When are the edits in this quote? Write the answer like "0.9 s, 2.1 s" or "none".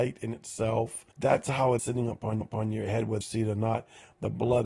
1.1 s, 1.8 s, 2.4 s, 3.2 s